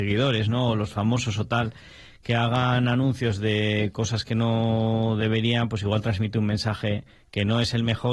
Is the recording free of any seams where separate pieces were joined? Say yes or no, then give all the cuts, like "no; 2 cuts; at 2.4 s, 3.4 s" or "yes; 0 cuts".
yes; 0 cuts